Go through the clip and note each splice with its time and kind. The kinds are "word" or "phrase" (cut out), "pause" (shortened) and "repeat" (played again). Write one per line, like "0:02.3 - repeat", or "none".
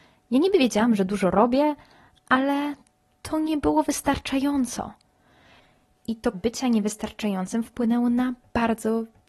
0:06.3 - word